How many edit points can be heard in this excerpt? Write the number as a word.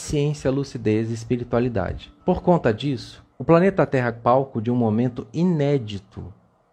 three